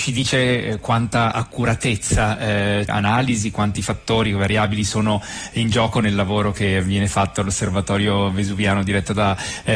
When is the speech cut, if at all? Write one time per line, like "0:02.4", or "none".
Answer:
0:02.9